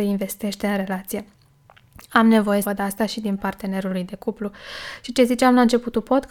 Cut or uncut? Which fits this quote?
cut